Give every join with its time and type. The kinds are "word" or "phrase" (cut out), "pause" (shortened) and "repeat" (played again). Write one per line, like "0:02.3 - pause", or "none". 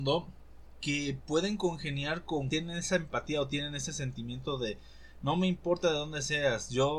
0:02.5 - word